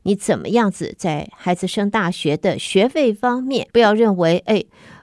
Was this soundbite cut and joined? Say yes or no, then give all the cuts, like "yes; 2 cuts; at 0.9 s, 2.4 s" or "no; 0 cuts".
yes; 1 cut; at 3.7 s